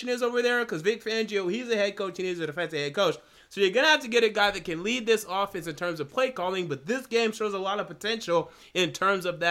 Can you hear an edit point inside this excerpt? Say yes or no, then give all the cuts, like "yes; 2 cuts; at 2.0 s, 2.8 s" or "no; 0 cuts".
no; 0 cuts